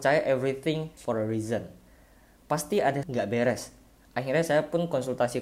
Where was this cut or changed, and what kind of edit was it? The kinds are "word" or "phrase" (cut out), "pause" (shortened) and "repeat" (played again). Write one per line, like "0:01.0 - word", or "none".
0:01.0 - word
0:03.0 - phrase